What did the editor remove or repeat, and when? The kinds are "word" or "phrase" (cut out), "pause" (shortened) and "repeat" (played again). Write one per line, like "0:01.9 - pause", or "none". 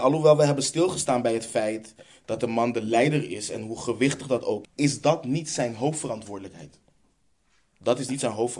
0:04.6 - word